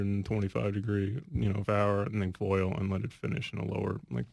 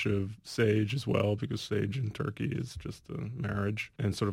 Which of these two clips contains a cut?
first; 3 cuts; at 1.2 s, 1.7 s, 2.3 s

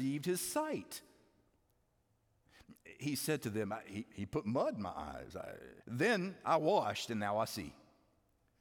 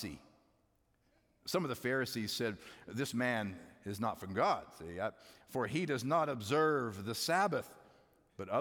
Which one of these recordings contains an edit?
first; 1 cut; at 5.8 s

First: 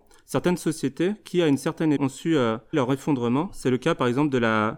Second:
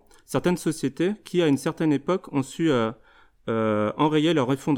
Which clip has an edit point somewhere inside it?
first; 2 cuts; at 2.0 s, 2.7 s

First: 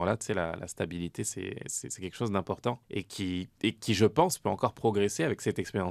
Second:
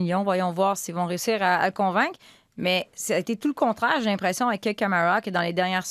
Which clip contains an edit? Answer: first; 1 cut; at 2.8 s

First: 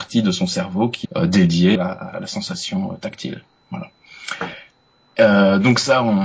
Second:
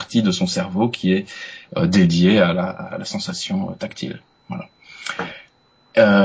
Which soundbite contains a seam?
first; 2 cuts; at 1.0 s, 1.7 s

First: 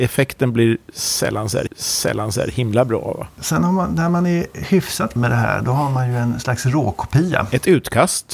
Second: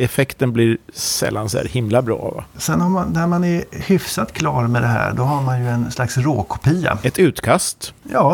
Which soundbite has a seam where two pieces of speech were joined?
first; 2 cuts; at 1.7 s, 5.2 s

